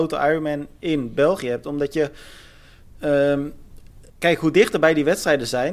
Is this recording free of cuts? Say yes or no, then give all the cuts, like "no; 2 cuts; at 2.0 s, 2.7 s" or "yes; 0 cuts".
no; 1 cut; at 4.1 s